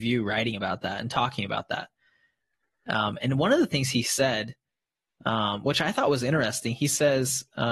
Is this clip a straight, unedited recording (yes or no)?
yes